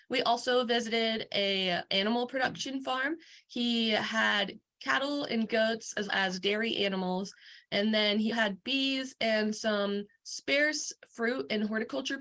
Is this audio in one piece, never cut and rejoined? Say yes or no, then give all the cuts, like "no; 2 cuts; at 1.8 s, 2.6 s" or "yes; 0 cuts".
no; 3 cuts; at 1.9 s, 6.1 s, 8.3 s